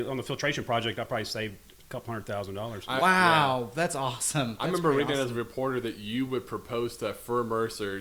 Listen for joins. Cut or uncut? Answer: uncut